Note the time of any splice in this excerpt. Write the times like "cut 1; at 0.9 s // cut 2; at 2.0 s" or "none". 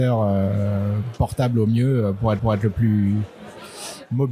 cut 1; at 2.4 s